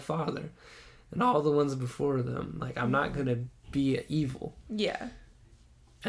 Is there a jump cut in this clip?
no; 0 cuts

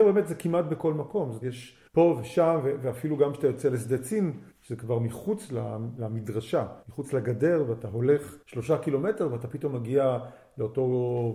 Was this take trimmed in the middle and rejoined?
yes; 5 cuts; at 1.4 s, 1.9 s, 4.5 s, 6.8 s, 8.4 s

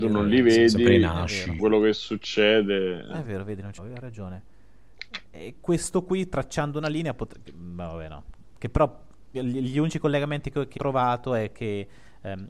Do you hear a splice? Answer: yes; 6 cuts; at 1.6 s, 3.2 s, 3.8 s, 5.6 s, 9.3 s, 10.8 s

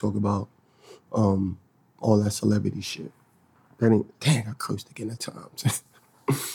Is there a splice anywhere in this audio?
yes; 1 cut; at 5.2 s

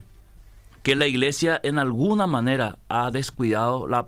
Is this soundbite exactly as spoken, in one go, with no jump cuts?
yes; 0 cuts

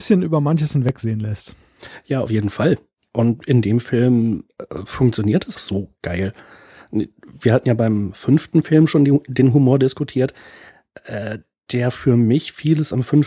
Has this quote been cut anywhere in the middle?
yes; 1 cut; at 5.6 s

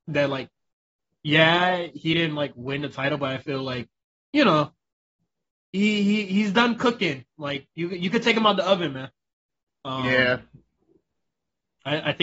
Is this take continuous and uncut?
yes; 0 cuts

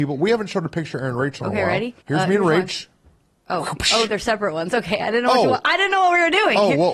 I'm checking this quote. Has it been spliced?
yes; 1 cut; at 2.0 s

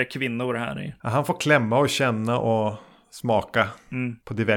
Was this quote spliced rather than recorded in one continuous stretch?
no; 0 cuts

